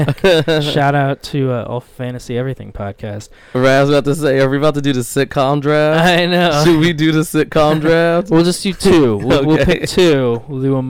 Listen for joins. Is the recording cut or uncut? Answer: uncut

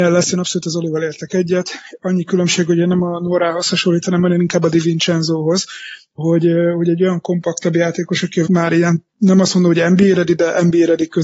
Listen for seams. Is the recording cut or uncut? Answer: cut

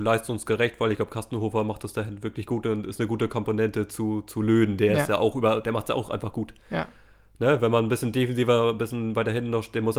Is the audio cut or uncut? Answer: uncut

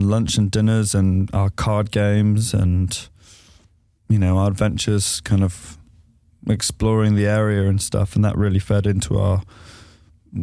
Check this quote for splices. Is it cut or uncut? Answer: uncut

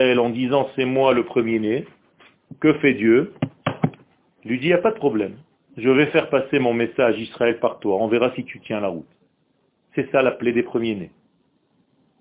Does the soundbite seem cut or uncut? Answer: uncut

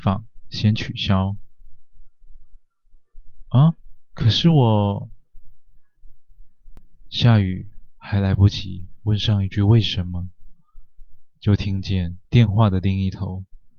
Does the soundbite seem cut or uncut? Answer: cut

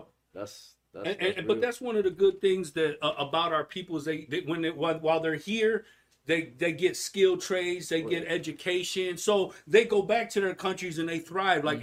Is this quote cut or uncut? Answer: uncut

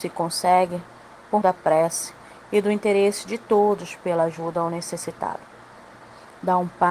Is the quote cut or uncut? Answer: cut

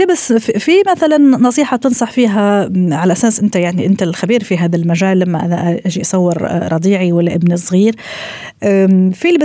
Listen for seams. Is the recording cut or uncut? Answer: uncut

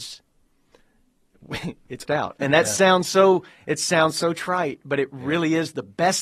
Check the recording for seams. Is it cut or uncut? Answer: cut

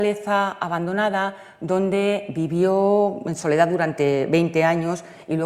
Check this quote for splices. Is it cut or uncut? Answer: uncut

